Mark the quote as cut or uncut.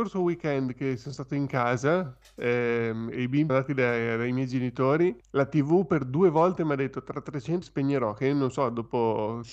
cut